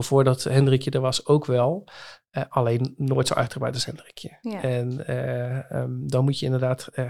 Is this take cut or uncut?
uncut